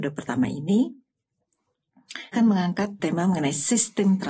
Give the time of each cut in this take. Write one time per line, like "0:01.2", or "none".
0:02.3
0:03.0